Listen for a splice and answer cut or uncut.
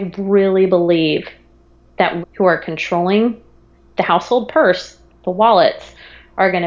cut